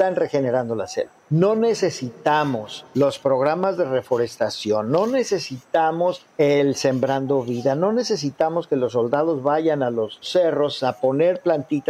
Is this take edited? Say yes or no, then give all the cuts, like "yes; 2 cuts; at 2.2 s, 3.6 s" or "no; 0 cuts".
yes; 2 cuts; at 1.2 s, 2.9 s